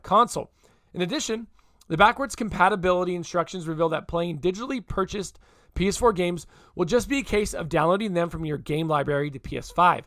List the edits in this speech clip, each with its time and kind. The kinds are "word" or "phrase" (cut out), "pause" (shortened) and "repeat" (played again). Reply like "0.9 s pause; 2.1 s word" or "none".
none